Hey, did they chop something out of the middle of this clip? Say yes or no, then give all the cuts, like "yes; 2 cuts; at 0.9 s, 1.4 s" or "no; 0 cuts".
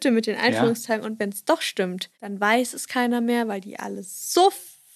yes; 1 cut; at 2.1 s